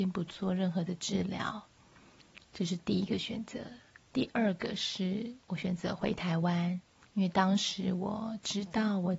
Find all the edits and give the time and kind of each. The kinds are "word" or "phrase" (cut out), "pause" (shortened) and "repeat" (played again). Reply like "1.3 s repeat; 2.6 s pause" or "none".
2.4 s pause; 5.4 s pause; 7.0 s pause